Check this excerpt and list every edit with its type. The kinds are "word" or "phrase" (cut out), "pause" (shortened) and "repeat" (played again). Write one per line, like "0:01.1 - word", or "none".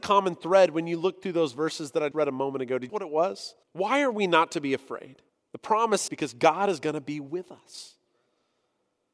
0:02.1 - word
0:02.9 - phrase
0:03.6 - pause
0:05.3 - pause
0:06.1 - word